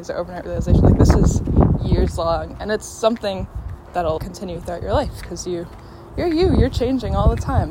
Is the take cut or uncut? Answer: cut